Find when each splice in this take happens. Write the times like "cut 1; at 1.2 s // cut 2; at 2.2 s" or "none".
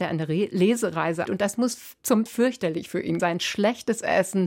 cut 1; at 1.3 s // cut 2; at 2.3 s // cut 3; at 3.2 s